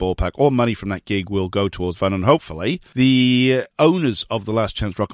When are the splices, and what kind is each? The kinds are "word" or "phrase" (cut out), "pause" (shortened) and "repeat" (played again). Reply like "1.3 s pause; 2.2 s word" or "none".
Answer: 1.9 s phrase